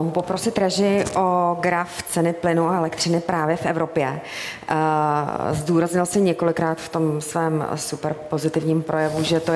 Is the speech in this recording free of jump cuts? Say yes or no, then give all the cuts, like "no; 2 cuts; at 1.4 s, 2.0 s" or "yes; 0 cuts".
yes; 0 cuts